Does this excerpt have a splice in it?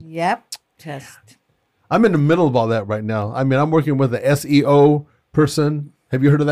no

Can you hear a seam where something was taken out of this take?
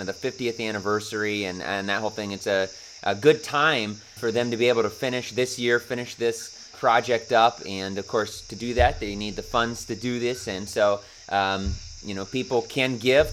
yes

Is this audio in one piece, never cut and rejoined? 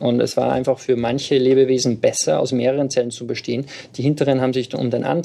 yes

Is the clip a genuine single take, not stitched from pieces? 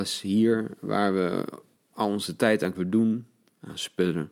no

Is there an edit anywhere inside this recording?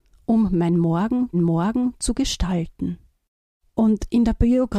yes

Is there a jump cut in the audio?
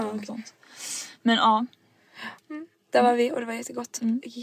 yes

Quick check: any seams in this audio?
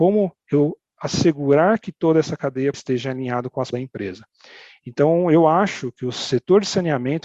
yes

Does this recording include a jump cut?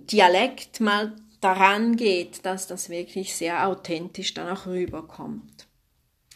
no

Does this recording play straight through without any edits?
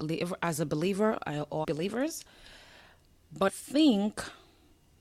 no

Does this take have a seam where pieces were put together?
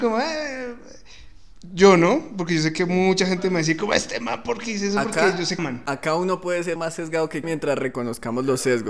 yes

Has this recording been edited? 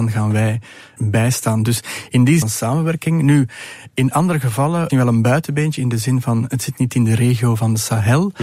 yes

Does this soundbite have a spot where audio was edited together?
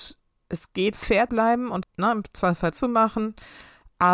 yes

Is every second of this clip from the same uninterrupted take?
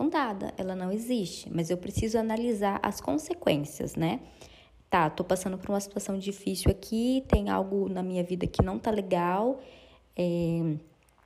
yes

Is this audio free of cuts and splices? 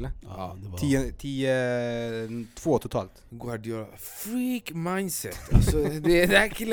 yes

